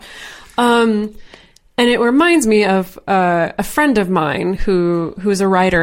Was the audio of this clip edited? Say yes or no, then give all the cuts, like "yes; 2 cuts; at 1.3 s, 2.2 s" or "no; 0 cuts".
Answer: no; 0 cuts